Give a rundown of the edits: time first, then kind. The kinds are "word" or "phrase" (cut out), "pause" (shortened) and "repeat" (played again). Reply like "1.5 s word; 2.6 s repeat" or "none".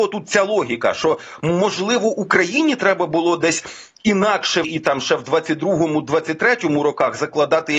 4.6 s word